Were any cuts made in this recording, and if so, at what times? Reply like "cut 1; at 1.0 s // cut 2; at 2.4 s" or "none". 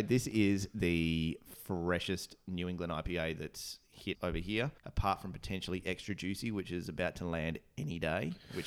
cut 1; at 4.1 s // cut 2; at 4.8 s